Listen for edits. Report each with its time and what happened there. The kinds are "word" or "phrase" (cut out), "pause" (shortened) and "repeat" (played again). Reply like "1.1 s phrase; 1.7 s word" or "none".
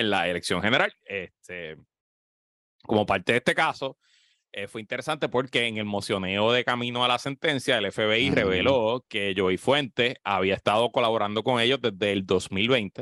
none